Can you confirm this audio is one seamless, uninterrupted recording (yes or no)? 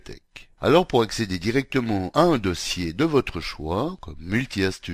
yes